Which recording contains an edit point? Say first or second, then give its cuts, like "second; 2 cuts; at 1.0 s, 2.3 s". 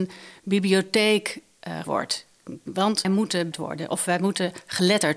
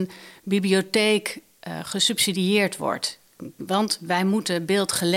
first; 3 cuts; at 1.8 s, 3.0 s, 3.5 s